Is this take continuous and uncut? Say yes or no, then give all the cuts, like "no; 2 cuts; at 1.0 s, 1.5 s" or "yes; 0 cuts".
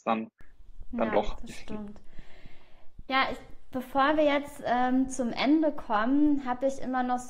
yes; 0 cuts